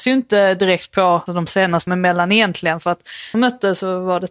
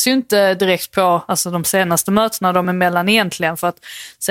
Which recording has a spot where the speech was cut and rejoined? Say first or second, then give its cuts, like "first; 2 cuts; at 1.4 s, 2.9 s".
first; 3 cuts; at 1.3 s, 1.9 s, 3.3 s